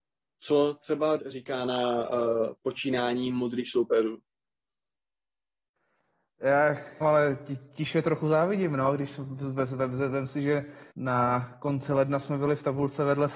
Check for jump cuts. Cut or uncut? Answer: cut